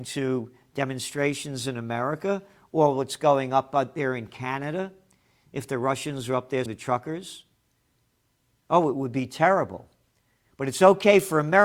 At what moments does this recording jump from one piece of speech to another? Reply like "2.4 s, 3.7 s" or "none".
6.7 s